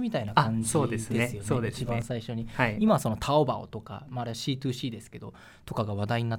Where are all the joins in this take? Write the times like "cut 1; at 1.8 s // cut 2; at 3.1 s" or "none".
none